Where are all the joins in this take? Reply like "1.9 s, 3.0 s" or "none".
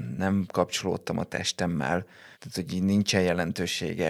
2.3 s